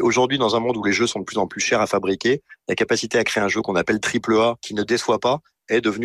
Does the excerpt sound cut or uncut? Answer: uncut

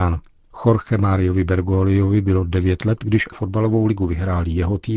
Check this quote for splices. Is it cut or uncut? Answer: cut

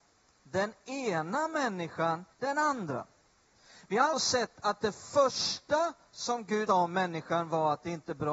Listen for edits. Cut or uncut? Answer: cut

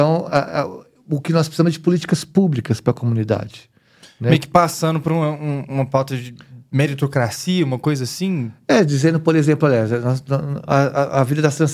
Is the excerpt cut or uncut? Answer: uncut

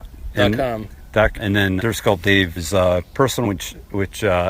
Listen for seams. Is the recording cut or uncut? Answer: cut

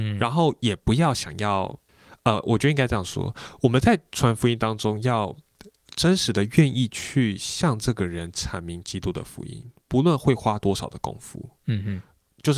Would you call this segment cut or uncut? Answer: uncut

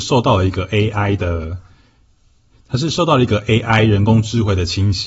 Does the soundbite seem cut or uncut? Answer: uncut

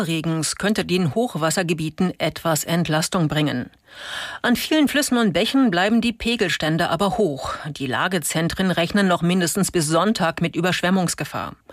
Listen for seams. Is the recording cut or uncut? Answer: uncut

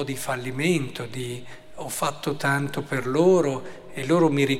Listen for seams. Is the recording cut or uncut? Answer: uncut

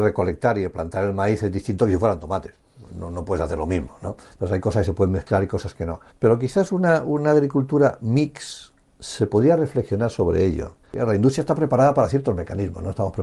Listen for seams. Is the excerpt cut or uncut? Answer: cut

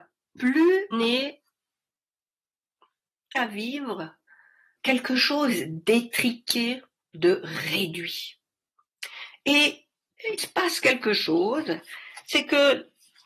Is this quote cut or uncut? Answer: cut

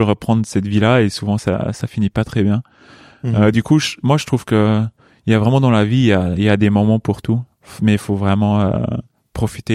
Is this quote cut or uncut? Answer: uncut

